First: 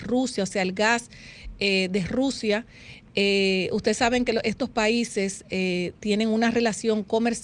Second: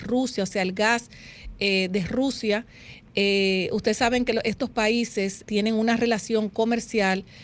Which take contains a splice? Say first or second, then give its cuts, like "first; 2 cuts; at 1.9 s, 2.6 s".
second; 1 cut; at 5.4 s